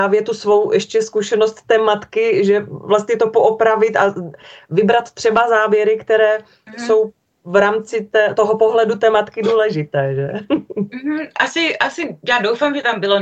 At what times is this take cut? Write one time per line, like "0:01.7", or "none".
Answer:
none